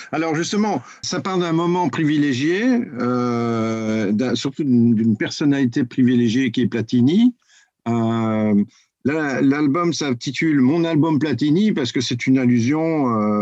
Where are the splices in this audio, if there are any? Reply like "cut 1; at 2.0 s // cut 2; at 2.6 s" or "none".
cut 1; at 1.0 s